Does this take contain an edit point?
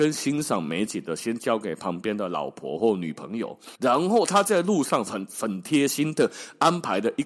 yes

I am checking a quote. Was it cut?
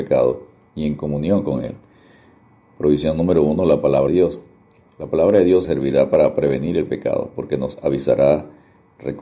yes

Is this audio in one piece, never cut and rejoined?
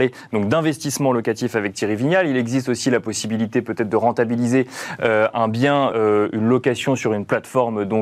no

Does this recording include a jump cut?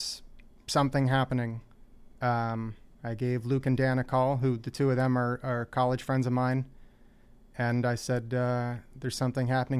no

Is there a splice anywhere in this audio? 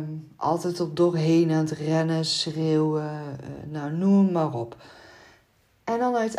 no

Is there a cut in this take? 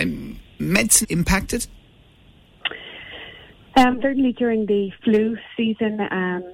yes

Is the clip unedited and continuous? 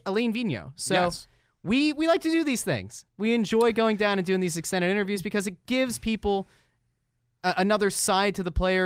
yes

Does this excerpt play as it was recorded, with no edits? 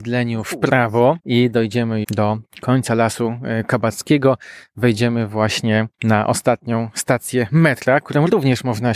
no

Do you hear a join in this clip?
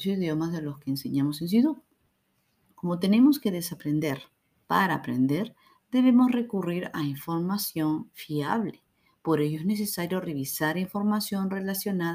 no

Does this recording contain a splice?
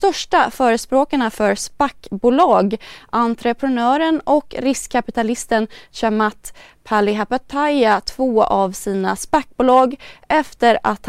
no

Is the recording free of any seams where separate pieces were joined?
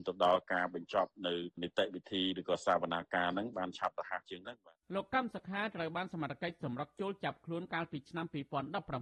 no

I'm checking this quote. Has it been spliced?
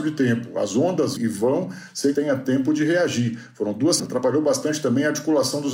yes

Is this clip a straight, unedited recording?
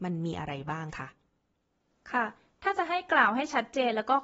yes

